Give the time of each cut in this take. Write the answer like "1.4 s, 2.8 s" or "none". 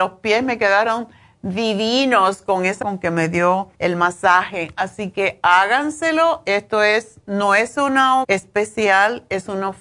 2.8 s, 3.7 s, 8.2 s